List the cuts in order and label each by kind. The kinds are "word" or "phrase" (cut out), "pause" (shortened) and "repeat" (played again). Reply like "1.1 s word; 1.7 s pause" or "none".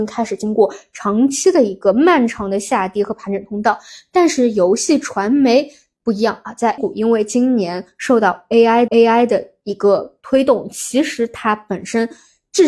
6.8 s word; 8.9 s repeat